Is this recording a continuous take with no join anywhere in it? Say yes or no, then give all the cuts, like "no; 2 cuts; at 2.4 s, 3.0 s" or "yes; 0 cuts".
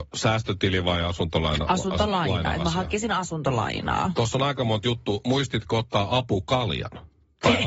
yes; 0 cuts